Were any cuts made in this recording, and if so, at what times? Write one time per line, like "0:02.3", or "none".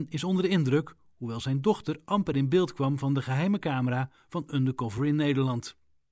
none